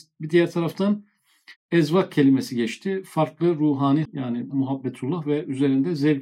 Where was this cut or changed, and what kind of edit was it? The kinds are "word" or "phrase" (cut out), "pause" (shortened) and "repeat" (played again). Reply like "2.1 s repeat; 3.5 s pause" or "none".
4.0 s word; 4.5 s word